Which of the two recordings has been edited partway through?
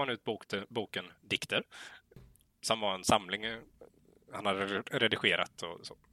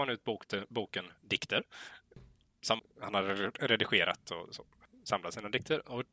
second; 1 cut; at 2.8 s

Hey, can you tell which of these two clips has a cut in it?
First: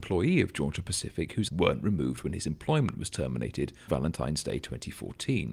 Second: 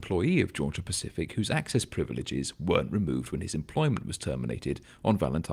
first; 2 cuts; at 1.5 s, 3.9 s

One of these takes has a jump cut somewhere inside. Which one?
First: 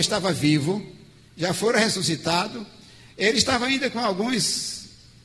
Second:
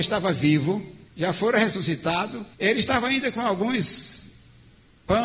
second; 2 cuts; at 1.1 s, 2.5 s

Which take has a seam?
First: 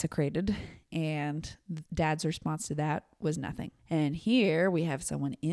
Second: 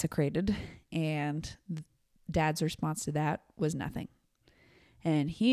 first; 2 cuts; at 1.9 s, 3.8 s

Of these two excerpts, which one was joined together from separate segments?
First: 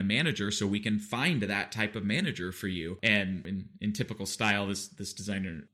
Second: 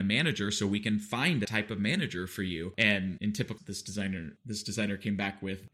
second; 3 cuts; at 1.4 s, 3.2 s, 3.6 s

